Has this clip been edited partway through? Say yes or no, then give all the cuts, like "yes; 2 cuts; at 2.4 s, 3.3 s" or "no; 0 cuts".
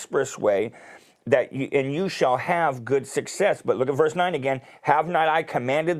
no; 0 cuts